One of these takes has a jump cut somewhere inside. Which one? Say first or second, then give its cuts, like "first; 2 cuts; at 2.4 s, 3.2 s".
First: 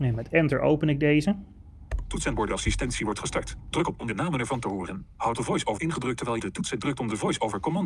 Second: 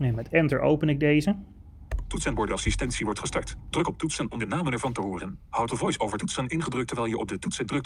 first; 3 cuts; at 4.0 s, 5.8 s, 6.4 s